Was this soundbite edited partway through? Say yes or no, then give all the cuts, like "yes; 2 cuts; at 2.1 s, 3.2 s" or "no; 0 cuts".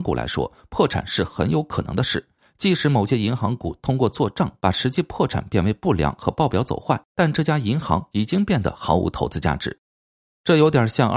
no; 0 cuts